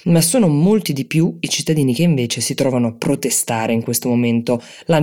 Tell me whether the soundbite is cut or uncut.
uncut